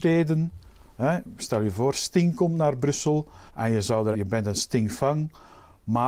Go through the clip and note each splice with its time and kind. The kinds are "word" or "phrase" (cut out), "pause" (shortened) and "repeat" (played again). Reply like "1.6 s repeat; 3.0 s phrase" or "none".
3.5 s pause; 4.1 s phrase